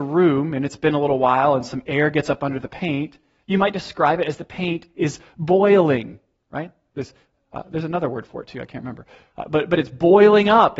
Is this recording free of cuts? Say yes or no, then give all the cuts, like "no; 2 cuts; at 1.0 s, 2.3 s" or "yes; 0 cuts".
yes; 0 cuts